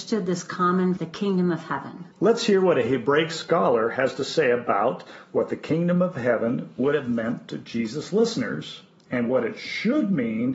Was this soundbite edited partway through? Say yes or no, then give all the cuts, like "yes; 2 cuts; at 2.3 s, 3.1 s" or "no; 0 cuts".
yes; 2 cuts; at 1.0 s, 2.1 s